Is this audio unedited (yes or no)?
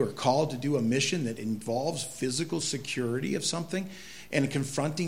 yes